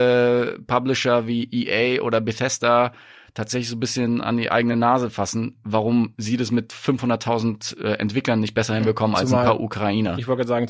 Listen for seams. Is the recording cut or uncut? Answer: uncut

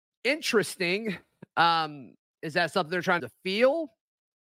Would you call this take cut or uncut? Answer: cut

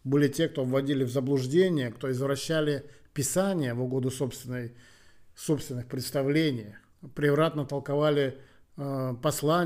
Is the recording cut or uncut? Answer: uncut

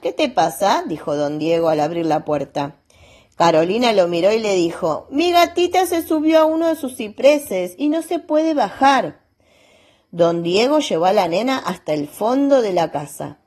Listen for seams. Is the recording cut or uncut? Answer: uncut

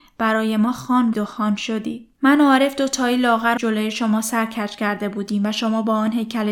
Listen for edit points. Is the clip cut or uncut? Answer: cut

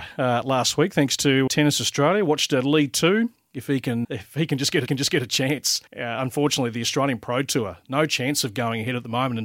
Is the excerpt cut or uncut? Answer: cut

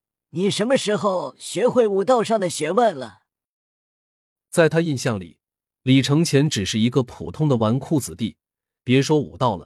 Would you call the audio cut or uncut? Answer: uncut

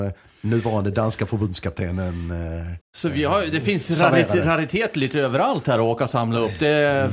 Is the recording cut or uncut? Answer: cut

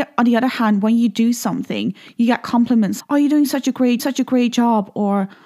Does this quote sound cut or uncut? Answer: cut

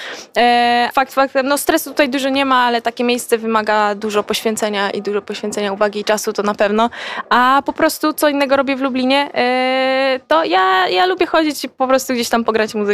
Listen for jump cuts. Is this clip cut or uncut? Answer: cut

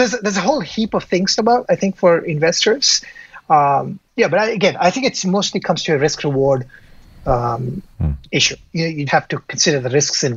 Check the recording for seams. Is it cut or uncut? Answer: cut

